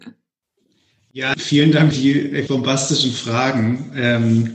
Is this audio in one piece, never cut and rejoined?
no; 3 cuts; at 1.3 s, 1.9 s, 2.5 s

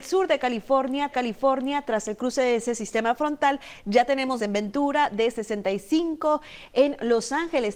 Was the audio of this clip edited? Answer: yes; 2 cuts; at 1.1 s, 4.4 s

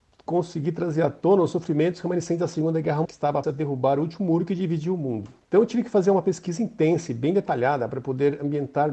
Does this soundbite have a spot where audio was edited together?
yes; 3 cuts; at 3.1 s, 3.4 s, 5.4 s

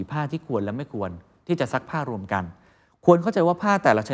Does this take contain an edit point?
no; 0 cuts

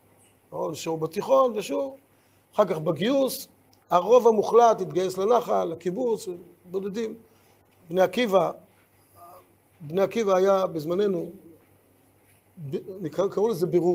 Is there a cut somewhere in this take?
no; 0 cuts

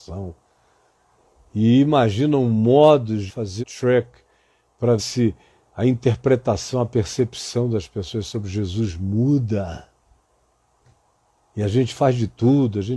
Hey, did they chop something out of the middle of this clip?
yes; 3 cuts; at 3.3 s, 3.6 s, 5.0 s

